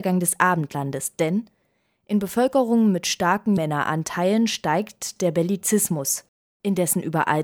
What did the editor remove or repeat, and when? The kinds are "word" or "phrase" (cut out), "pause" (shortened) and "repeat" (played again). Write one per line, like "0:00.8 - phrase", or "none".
0:03.6 - word